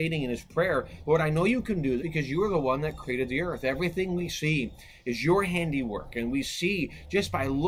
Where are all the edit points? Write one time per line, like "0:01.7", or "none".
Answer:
0:02.0

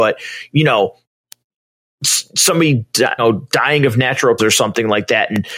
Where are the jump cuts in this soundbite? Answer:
0:03.2
0:04.4

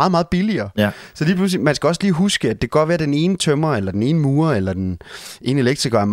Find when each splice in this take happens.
none

